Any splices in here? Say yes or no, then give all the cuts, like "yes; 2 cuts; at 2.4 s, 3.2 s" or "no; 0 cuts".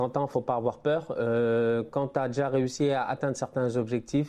no; 0 cuts